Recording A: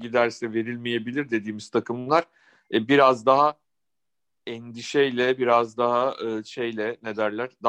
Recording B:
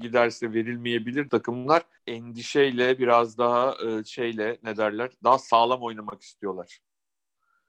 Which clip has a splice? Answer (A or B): B